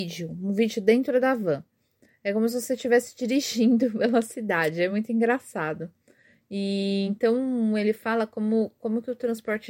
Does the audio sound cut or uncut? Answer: uncut